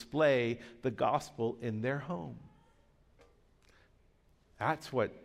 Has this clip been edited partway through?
no; 0 cuts

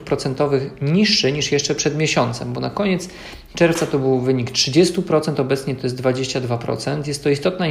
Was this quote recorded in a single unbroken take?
yes; 0 cuts

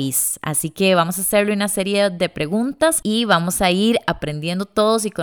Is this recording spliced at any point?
no; 0 cuts

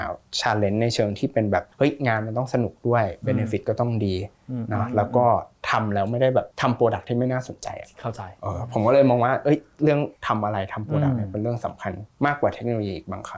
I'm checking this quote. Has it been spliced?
yes; 3 cuts; at 1.7 s, 6.5 s, 10.2 s

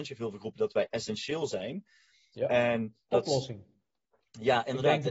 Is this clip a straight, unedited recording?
no; 1 cut; at 3.1 s

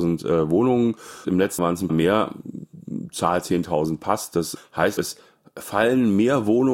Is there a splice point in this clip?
yes; 5 cuts; at 1.2 s, 1.6 s, 1.9 s, 4.6 s, 5.0 s

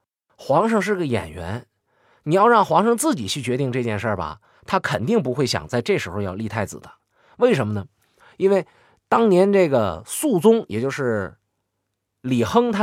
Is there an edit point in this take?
no; 0 cuts

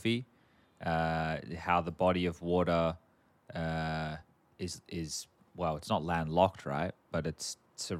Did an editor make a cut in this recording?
no; 0 cuts

